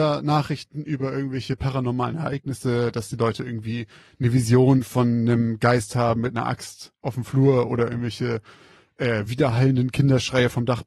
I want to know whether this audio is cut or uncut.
uncut